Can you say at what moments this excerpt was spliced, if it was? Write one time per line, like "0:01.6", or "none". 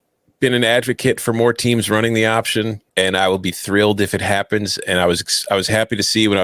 0:02.9